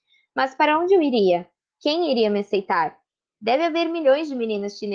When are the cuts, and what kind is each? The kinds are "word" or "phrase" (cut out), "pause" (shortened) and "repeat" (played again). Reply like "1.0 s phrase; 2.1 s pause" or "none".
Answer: none